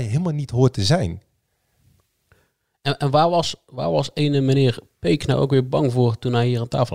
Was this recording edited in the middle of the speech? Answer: no; 0 cuts

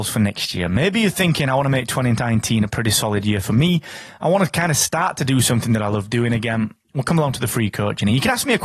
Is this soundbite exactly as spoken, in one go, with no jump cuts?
yes; 0 cuts

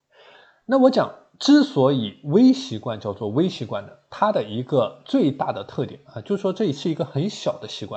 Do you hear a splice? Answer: no; 0 cuts

